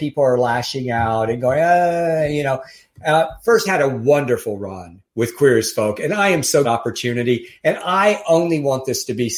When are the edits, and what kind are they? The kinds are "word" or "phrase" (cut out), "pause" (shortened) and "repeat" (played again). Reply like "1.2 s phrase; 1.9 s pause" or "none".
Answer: 3.7 s phrase; 5.1 s pause; 6.6 s phrase